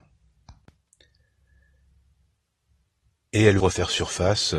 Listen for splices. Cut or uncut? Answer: cut